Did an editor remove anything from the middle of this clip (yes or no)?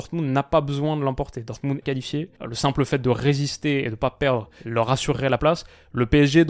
yes